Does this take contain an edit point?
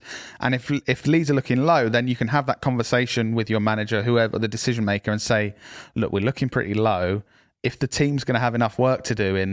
no; 0 cuts

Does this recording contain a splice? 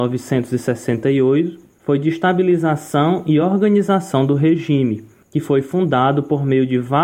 no; 0 cuts

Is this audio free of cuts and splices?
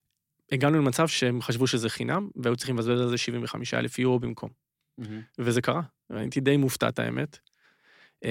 yes; 0 cuts

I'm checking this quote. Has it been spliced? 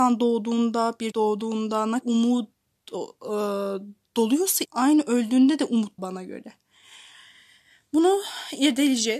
yes; 4 cuts; at 1.1 s, 2.0 s, 4.6 s, 6.0 s

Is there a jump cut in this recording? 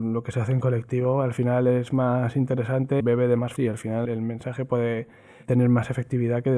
yes; 3 cuts; at 3.0 s, 3.6 s, 4.1 s

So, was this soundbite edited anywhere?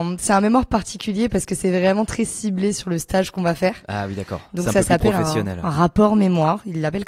no; 0 cuts

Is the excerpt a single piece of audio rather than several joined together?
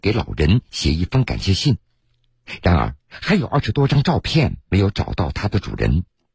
no; 1 cut; at 3.0 s

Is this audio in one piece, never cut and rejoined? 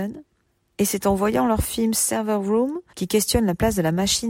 no; 1 cut; at 2.9 s

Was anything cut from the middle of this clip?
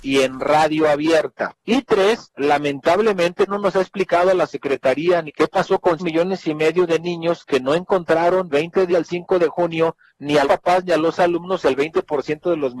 yes; 8 cuts; at 1.6 s, 3.5 s, 5.3 s, 6.0 s, 8.5 s, 8.9 s, 10.1 s, 10.4 s

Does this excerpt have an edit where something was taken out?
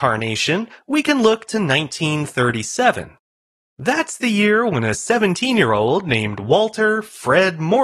no; 0 cuts

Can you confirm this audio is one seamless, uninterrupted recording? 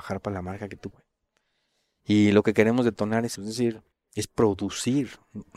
no; 3 cuts; at 0.9 s, 3.4 s, 3.9 s

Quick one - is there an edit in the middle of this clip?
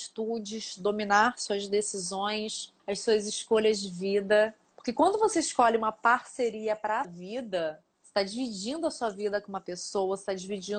yes; 3 cuts; at 2.8 s, 7.0 s, 7.9 s

